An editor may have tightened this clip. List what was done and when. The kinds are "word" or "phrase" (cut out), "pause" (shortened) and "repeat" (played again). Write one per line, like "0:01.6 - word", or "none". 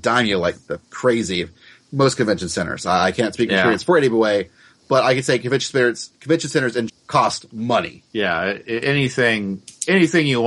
0:06.9 - word
0:08.1 - pause